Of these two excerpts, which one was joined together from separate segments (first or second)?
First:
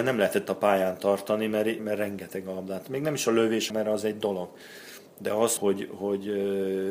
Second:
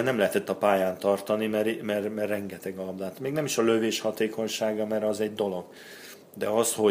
first